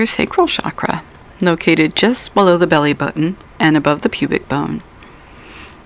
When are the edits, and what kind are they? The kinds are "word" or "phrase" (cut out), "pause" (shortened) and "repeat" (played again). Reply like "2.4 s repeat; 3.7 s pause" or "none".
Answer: none